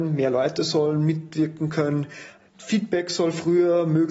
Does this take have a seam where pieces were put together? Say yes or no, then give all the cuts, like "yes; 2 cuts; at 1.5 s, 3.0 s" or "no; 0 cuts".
no; 0 cuts